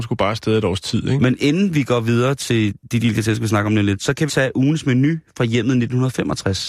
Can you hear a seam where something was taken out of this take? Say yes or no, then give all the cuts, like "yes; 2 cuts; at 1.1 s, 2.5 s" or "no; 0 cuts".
yes; 1 cut; at 4.3 s